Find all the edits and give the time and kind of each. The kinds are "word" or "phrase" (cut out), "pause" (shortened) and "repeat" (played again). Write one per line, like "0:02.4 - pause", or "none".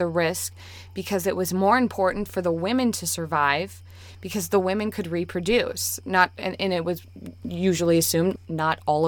none